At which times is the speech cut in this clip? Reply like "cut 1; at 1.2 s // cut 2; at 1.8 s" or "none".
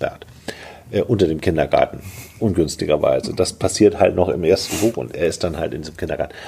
none